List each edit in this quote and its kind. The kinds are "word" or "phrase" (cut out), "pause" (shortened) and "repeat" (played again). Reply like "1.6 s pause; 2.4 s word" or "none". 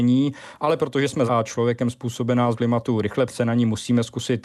1.3 s word; 2.5 s word; 3.3 s phrase